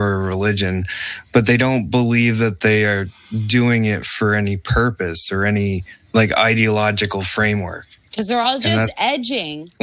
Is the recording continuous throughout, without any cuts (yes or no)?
yes